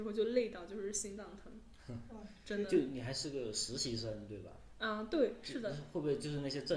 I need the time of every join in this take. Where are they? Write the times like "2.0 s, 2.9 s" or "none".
none